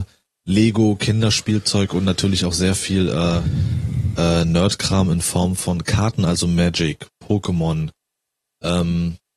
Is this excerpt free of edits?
yes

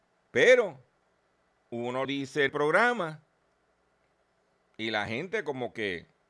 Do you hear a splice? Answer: yes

